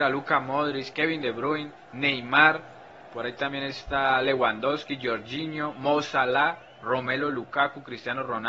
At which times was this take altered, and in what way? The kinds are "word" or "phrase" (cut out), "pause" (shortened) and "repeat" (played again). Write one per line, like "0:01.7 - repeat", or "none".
0:01.8 - pause